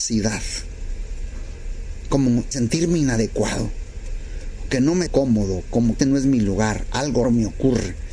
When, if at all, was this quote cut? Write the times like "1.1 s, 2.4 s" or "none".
2.5 s, 4.7 s, 5.1 s, 6.0 s, 7.2 s